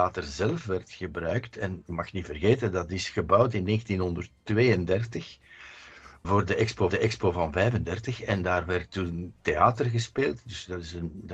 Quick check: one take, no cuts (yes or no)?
no